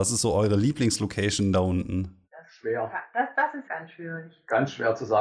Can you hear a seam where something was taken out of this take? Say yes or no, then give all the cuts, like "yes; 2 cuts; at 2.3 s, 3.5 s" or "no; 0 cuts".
yes; 3 cuts; at 2.2 s, 3.3 s, 3.6 s